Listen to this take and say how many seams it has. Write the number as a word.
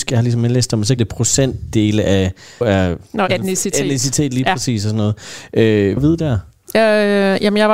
four